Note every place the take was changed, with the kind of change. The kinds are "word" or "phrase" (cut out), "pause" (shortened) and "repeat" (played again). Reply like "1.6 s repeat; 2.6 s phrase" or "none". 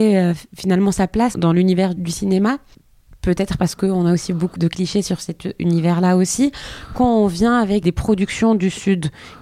1.3 s word; 2.0 s word; 4.6 s word; 7.8 s word